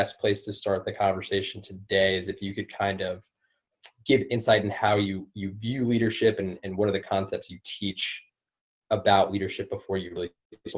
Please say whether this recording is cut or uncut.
uncut